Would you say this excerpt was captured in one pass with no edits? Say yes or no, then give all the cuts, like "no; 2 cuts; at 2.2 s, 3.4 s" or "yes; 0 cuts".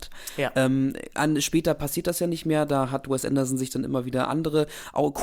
yes; 0 cuts